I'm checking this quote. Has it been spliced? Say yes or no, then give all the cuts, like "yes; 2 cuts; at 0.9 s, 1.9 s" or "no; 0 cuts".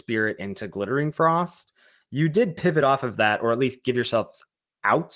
no; 0 cuts